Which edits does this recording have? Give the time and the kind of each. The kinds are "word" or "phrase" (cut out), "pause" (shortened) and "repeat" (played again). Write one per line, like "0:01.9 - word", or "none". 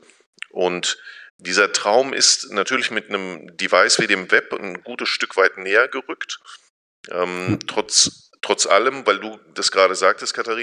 0:01.3 - pause